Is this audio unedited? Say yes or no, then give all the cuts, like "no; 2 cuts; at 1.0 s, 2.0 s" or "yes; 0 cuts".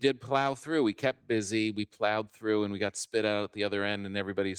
yes; 0 cuts